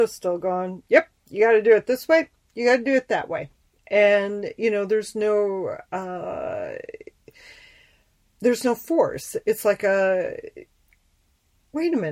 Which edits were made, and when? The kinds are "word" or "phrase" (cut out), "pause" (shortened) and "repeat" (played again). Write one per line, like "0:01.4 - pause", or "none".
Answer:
none